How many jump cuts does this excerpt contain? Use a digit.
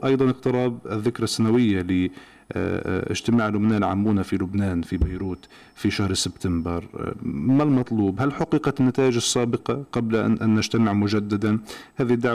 0